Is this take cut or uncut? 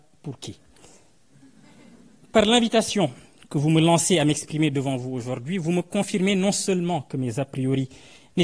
uncut